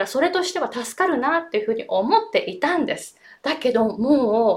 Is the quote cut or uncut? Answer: cut